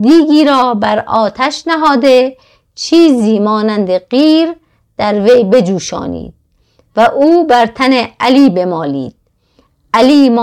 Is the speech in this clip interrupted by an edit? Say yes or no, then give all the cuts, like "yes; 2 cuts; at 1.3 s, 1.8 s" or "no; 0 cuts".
no; 0 cuts